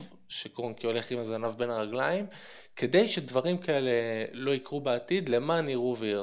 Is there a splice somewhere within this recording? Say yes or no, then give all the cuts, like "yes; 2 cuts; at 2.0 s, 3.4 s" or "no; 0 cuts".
no; 0 cuts